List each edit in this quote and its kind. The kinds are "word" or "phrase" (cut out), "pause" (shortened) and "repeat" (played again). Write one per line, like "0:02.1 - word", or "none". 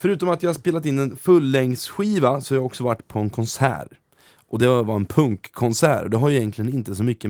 none